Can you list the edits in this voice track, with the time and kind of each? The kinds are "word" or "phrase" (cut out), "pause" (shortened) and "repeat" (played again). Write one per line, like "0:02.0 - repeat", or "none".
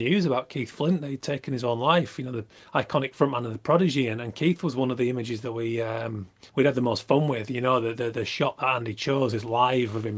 0:02.6 - pause
0:06.5 - pause